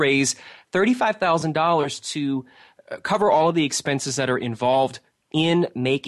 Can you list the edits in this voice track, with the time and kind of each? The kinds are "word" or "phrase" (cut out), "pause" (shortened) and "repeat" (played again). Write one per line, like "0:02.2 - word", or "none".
none